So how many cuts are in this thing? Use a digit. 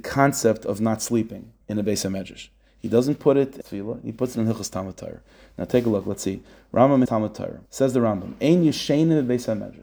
4